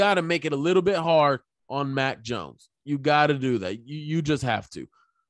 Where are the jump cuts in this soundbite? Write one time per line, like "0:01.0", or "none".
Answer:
none